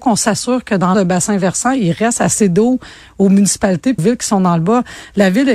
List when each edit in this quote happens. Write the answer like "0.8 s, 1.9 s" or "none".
0.9 s, 4.0 s